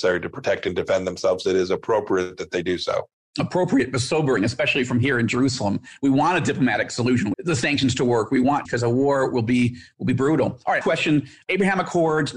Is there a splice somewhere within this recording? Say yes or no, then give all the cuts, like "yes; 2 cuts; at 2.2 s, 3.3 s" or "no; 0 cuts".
yes; 4 cuts; at 3.1 s, 7.3 s, 8.6 s, 10.8 s